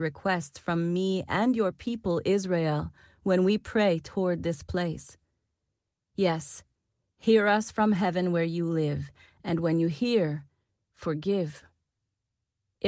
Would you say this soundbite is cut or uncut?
uncut